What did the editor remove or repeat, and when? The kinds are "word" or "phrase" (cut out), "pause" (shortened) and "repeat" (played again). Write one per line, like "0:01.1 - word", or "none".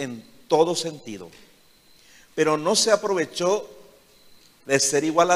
none